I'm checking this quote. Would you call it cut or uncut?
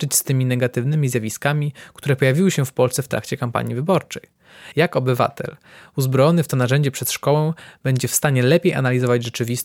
uncut